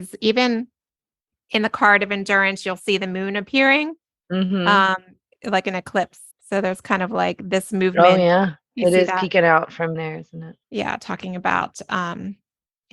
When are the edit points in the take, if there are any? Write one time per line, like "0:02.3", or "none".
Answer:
0:04.1
0:06.3
0:10.0
0:10.6